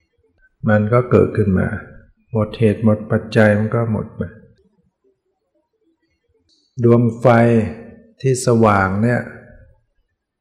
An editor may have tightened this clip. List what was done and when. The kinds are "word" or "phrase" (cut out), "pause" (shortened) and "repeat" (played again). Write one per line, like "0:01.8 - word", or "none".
none